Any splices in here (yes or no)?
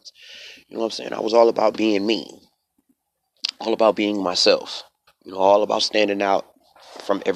yes